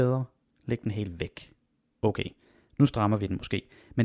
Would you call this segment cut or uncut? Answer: uncut